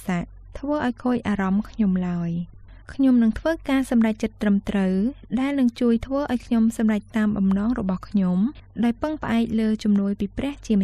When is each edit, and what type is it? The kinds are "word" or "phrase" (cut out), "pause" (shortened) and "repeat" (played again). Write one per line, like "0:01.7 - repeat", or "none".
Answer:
0:02.8 - pause